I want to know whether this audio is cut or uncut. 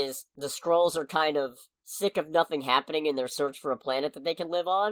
cut